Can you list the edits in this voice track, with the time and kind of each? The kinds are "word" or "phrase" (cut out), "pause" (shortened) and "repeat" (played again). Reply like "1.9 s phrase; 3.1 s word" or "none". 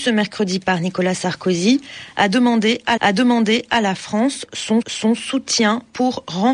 3.0 s repeat; 4.8 s repeat